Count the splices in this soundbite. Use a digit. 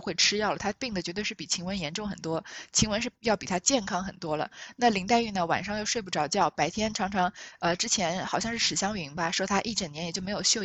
0